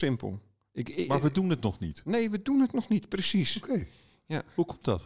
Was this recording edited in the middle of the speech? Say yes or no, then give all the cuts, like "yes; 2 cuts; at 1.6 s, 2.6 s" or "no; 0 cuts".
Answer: no; 0 cuts